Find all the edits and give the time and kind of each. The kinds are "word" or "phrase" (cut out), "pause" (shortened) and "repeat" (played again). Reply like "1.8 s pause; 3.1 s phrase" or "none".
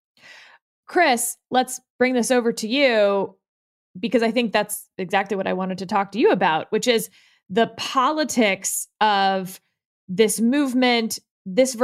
none